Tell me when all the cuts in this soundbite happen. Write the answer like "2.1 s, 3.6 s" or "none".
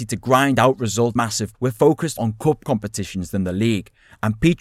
1.2 s, 1.5 s, 2.2 s